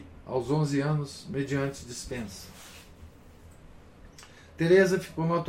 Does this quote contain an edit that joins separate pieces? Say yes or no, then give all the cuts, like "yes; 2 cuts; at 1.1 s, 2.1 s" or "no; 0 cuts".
no; 0 cuts